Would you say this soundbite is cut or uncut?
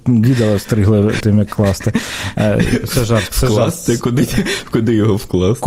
cut